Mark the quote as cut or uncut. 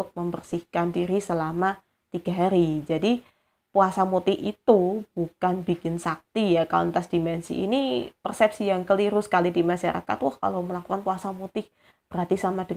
uncut